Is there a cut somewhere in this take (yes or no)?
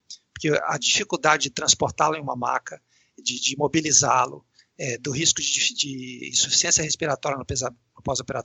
no